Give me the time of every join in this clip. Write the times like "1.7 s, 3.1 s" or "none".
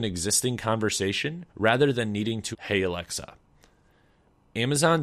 1.5 s, 2.5 s